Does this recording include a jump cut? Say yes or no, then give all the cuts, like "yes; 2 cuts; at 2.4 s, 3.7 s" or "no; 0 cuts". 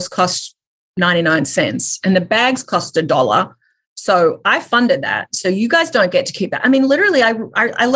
no; 0 cuts